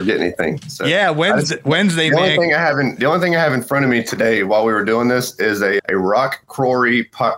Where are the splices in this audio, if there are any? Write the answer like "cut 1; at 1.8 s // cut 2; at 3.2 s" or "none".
cut 1; at 5.8 s